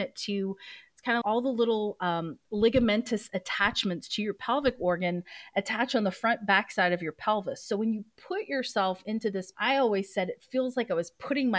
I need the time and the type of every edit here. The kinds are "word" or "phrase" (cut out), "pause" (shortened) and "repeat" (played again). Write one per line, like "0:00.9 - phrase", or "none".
0:01.2 - word
0:09.5 - word